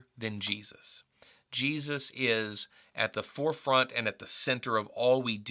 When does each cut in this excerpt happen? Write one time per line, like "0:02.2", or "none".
none